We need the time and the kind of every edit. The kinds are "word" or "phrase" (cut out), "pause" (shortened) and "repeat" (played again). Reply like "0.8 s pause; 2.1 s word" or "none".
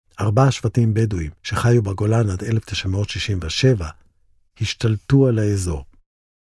1.4 s pause